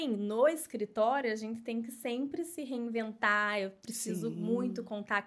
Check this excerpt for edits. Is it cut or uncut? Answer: uncut